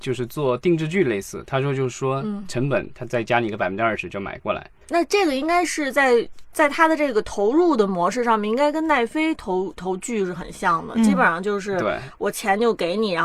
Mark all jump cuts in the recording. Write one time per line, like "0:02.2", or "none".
0:04.8

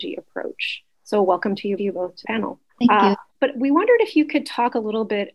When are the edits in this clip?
0:00.9
0:01.8
0:02.2
0:02.7
0:03.3

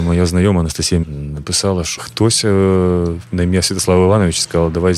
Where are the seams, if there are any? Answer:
0:01.0
0:02.0

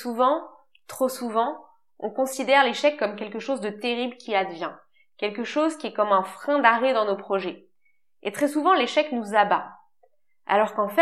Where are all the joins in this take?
none

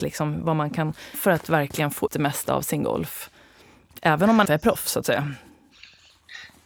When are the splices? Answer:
0:01.1
0:02.1
0:04.5

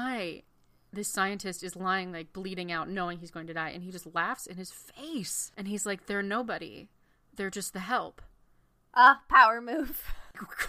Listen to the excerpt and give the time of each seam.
none

